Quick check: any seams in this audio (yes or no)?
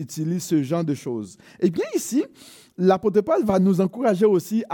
no